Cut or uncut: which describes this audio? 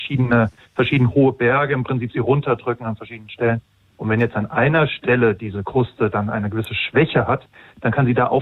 uncut